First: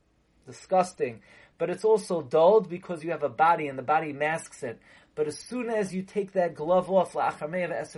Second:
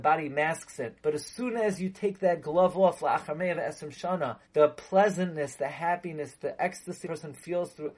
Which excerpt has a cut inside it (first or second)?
second